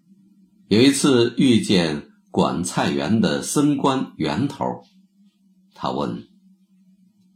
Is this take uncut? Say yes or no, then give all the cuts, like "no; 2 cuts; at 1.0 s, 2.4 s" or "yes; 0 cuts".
yes; 0 cuts